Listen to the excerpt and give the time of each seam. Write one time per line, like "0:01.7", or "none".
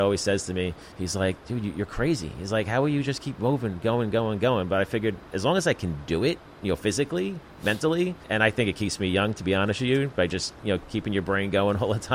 0:00.9
0:01.4
0:08.2